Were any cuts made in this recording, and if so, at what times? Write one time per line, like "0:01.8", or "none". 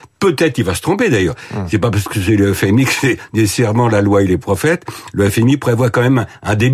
none